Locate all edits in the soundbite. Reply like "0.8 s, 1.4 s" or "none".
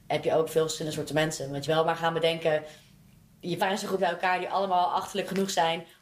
1.7 s, 3.6 s, 4.0 s